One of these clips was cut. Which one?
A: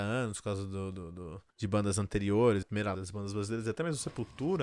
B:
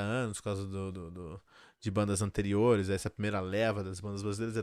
A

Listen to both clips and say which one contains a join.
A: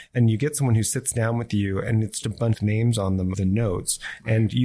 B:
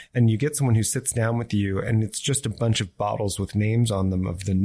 A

